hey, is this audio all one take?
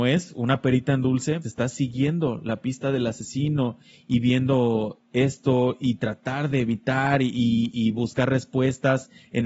no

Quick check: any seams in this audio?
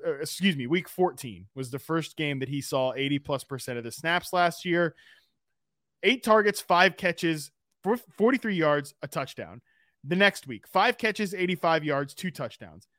no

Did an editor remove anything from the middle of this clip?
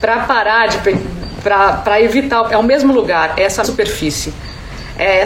yes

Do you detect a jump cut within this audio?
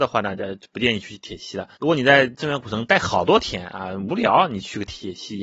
yes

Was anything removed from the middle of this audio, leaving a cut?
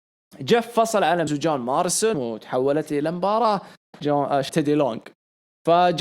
yes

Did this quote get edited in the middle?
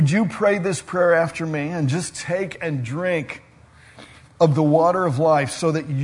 no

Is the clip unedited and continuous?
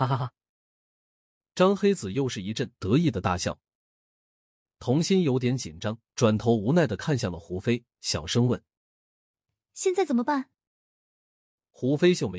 no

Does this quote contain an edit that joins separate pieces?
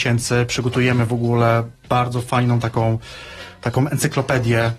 no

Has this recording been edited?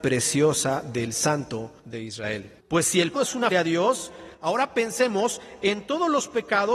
yes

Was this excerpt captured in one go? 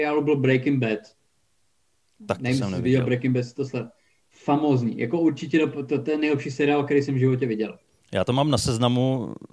yes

